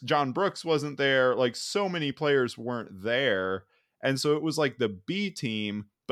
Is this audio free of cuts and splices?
yes; 0 cuts

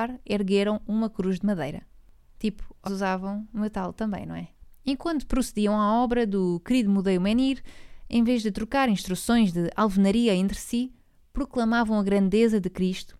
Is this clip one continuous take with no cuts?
no; 1 cut; at 2.8 s

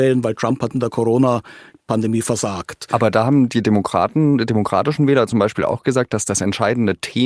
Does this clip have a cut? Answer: no; 0 cuts

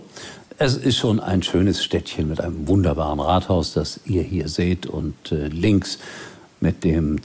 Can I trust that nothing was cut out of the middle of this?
yes; 0 cuts

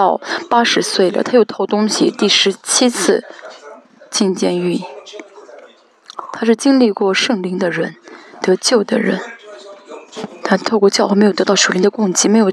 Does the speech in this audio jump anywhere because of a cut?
no; 0 cuts

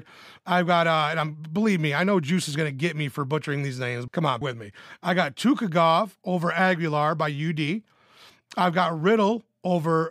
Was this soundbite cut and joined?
yes; 2 cuts; at 4.1 s, 4.4 s

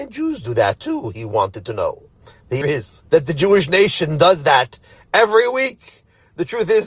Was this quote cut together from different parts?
yes; 2 cuts; at 2.6 s, 3.1 s

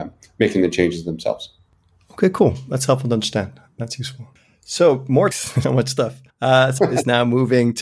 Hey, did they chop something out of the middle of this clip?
yes; 4 cuts; at 5.3 s, 5.6 s, 6.3 s, 6.8 s

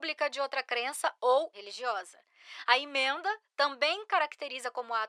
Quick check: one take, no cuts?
no; 1 cut; at 1.5 s

